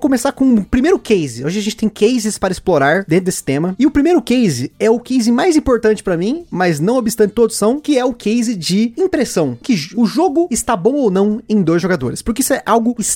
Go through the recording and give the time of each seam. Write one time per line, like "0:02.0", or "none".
0:09.6